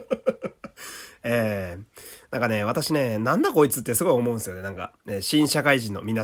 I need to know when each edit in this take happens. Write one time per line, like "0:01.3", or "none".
none